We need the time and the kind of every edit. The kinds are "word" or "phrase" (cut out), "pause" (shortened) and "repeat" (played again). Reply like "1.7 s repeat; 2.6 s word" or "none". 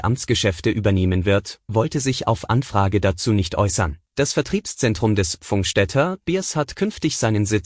4.1 s pause

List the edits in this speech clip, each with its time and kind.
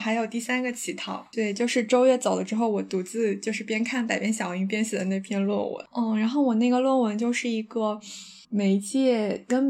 8.4 s word

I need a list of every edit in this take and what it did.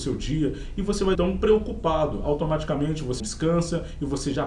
1.1 s word; 3.2 s word

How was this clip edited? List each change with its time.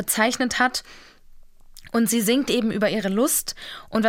none

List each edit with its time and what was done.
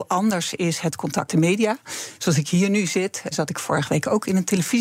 1.3 s word; 3.3 s word

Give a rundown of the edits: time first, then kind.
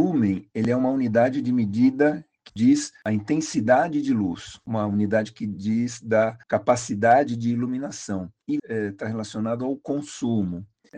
2.5 s word; 6.4 s pause; 8.6 s word

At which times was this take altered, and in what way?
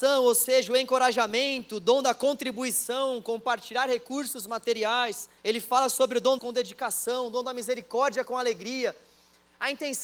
5.4 s pause; 6.4 s word

